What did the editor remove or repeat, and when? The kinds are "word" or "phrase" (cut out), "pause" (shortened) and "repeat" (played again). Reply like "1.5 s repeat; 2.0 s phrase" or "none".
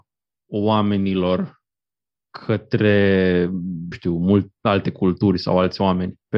3.9 s word